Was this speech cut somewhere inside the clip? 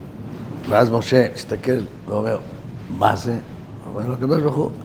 no; 0 cuts

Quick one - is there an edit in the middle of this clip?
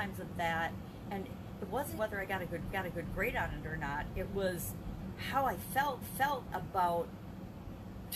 yes; 3 cuts; at 2.0 s, 2.7 s, 6.0 s

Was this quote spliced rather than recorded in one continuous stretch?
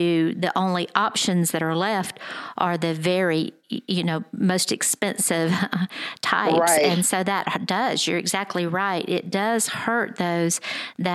no; 0 cuts

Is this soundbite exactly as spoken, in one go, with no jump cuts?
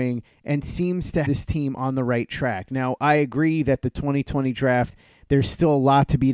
no; 1 cut; at 1.2 s

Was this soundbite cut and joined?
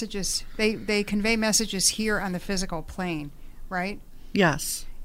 no; 0 cuts

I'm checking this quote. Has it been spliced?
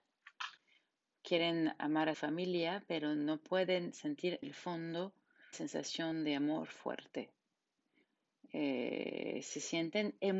yes; 3 cuts; at 2.1 s, 4.4 s, 5.5 s

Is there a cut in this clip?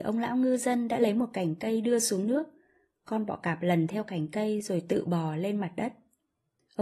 no; 0 cuts

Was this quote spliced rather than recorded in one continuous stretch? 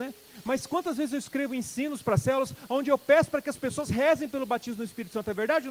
no; 0 cuts

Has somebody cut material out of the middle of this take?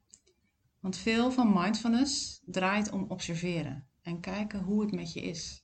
no; 0 cuts

